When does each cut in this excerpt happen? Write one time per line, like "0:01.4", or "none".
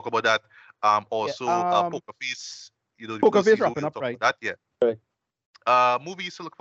none